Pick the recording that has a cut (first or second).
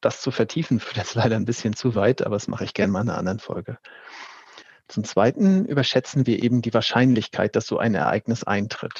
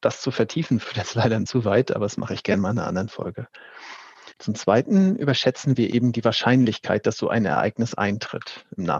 second